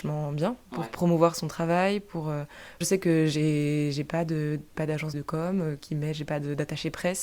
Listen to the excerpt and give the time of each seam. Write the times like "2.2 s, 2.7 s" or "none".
2.8 s, 4.7 s, 5.1 s, 5.8 s